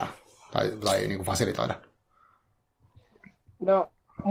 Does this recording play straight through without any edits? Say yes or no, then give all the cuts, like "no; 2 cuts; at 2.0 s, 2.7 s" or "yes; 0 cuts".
yes; 0 cuts